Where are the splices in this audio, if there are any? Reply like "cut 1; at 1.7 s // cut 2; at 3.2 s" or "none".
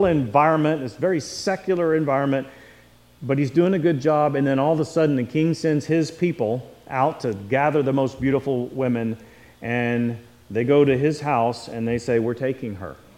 none